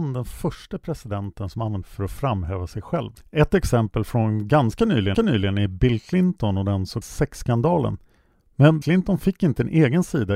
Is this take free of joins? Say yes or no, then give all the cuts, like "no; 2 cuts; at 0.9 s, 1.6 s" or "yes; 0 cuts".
no; 5 cuts; at 1.8 s, 3.2 s, 5.1 s, 7.0 s, 8.8 s